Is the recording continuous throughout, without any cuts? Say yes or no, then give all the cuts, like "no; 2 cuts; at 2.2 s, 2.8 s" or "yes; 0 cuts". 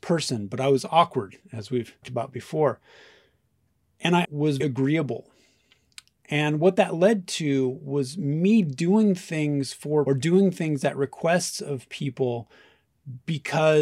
no; 4 cuts; at 2.0 s, 4.2 s, 4.6 s, 10.1 s